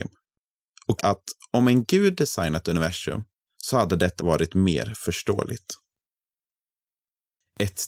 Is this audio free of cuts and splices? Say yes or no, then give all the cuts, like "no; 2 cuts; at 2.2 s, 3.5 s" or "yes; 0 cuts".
no; 3 cuts; at 1.0 s, 3.4 s, 4.2 s